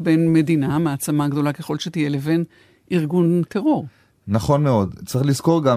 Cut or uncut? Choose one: uncut